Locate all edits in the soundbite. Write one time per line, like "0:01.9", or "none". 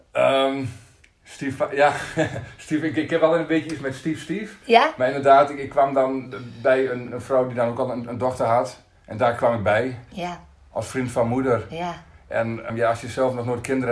0:07.1
0:12.7